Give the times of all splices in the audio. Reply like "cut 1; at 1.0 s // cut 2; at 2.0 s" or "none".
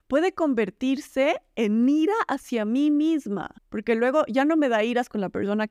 cut 1; at 3.6 s